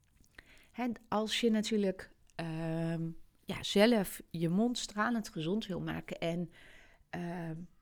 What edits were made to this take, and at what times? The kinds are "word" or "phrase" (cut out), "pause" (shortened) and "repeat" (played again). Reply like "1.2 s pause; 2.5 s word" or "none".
none